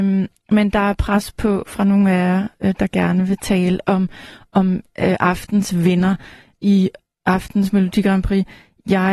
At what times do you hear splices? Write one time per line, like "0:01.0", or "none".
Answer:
none